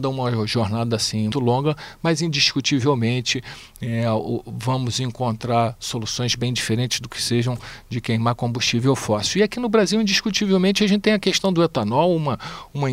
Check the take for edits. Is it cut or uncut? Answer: cut